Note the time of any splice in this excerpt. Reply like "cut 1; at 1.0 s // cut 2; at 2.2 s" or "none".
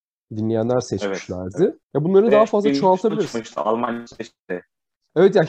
cut 1; at 1.8 s